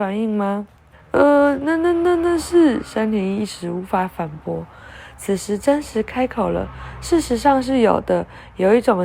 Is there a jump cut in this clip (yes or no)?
yes